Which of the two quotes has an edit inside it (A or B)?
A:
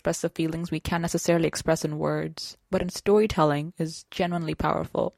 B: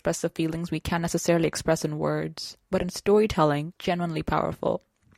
B